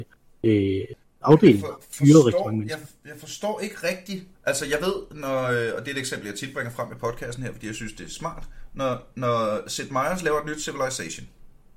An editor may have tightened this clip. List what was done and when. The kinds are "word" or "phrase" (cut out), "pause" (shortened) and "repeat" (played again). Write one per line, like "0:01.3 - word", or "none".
0:01.0 - pause
0:04.3 - pause